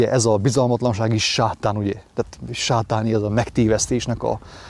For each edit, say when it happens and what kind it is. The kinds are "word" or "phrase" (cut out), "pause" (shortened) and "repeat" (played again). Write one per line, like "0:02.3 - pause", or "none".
none